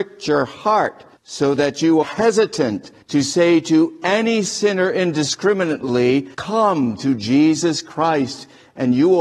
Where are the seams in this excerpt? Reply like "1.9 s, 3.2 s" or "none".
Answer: 1.2 s, 2.0 s, 3.0 s, 6.3 s